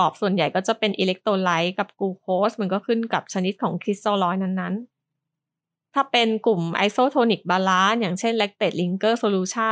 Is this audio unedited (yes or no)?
no